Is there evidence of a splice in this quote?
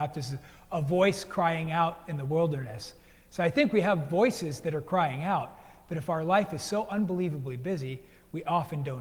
no; 0 cuts

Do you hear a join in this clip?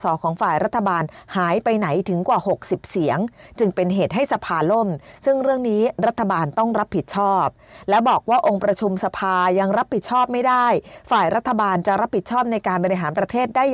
no; 0 cuts

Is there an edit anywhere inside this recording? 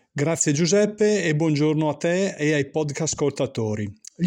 no; 0 cuts

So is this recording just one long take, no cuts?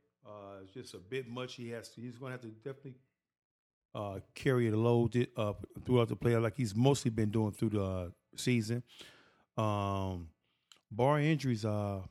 yes; 0 cuts

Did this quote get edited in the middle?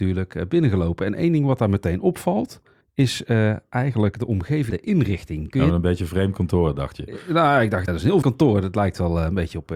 yes; 4 cuts; at 2.8 s, 4.7 s, 7.9 s, 8.2 s

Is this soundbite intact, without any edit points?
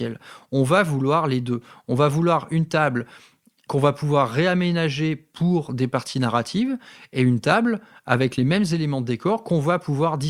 yes; 0 cuts

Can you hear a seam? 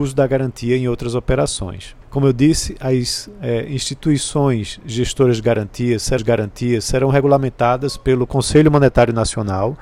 yes; 2 cuts; at 2.0 s, 6.2 s

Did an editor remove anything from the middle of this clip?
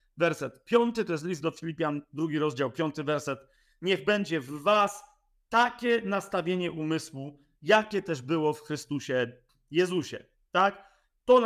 no; 0 cuts

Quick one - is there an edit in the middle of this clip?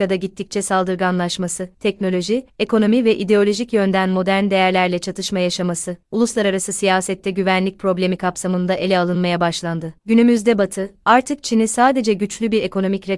no; 0 cuts

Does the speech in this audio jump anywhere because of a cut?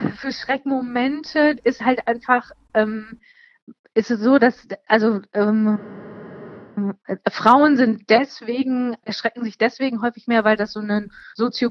yes; 1 cut; at 9.0 s

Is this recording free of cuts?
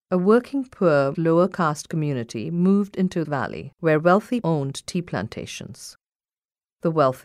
no; 3 cuts; at 1.1 s, 3.2 s, 4.4 s

